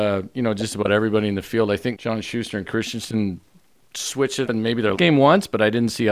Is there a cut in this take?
yes; 4 cuts; at 1.9 s, 2.6 s, 4.4 s, 4.9 s

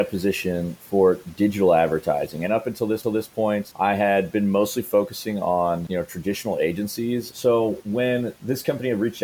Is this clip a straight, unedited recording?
no; 1 cut; at 3.0 s

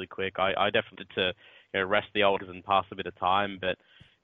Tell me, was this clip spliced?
yes; 2 cuts; at 0.9 s, 2.4 s

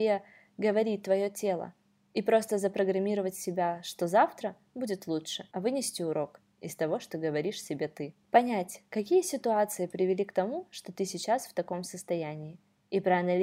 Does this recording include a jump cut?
no; 0 cuts

